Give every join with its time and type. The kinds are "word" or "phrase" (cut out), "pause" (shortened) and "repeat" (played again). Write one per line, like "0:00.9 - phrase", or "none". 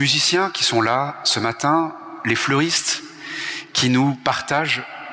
none